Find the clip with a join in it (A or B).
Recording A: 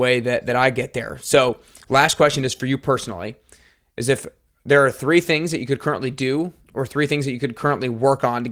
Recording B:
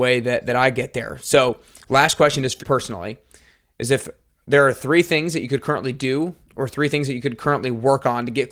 B